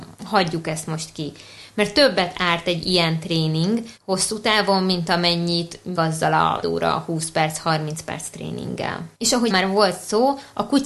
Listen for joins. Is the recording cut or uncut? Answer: cut